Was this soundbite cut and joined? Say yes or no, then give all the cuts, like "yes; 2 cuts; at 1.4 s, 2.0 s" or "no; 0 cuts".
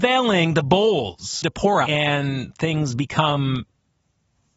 yes; 2 cuts; at 1.4 s, 1.8 s